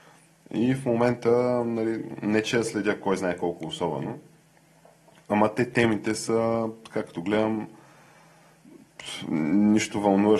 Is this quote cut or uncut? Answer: uncut